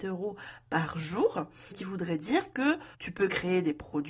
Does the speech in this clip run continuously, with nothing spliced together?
no; 2 cuts; at 1.7 s, 2.9 s

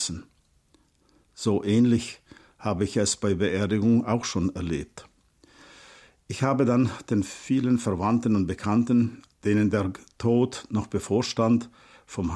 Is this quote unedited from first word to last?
yes; 0 cuts

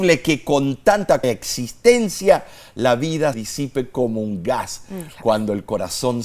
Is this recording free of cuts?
no; 2 cuts; at 1.2 s, 3.3 s

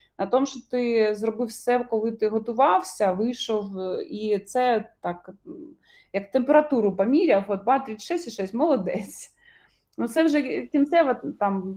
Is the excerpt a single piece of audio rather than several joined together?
yes; 0 cuts

